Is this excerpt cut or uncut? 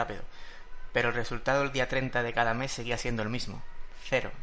uncut